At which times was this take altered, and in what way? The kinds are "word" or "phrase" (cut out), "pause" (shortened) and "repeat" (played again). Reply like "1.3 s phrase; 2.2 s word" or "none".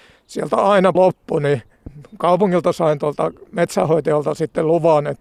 0.9 s word; 3.5 s pause